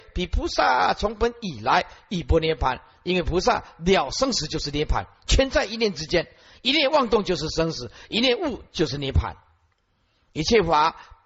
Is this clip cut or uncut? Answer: uncut